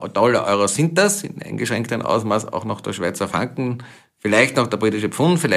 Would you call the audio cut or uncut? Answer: uncut